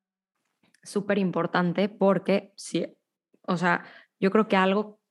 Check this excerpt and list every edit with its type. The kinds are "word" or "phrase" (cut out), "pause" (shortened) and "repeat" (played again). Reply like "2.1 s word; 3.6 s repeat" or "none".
none